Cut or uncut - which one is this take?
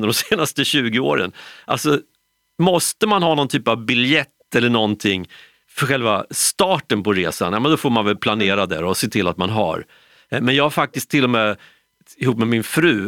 uncut